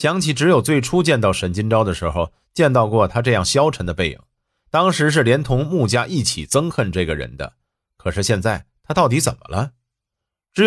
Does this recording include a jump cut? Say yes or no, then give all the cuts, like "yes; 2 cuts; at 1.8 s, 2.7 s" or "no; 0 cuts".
no; 0 cuts